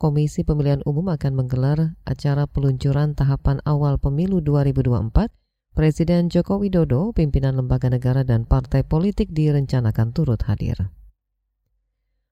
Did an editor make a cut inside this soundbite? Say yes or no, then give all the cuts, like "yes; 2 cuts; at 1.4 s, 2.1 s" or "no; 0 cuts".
no; 0 cuts